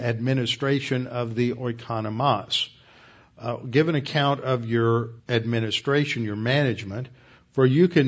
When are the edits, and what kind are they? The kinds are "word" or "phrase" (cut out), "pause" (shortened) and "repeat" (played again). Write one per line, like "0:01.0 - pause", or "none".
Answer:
0:05.2 - pause